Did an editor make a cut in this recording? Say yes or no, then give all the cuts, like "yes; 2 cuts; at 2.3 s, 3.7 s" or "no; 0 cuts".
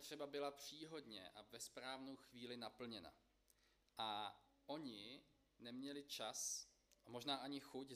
no; 0 cuts